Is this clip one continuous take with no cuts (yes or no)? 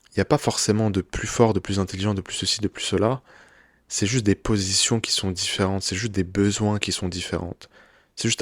yes